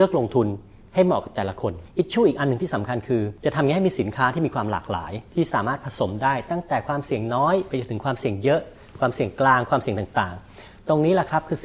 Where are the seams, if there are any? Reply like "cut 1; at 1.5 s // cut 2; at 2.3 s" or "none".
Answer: cut 1; at 5.3 s